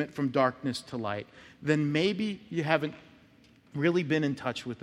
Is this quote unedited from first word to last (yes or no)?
yes